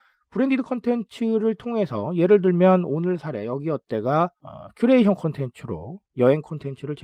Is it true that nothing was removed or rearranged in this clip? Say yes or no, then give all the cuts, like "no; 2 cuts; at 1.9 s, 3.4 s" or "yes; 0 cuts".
no; 1 cut; at 4.4 s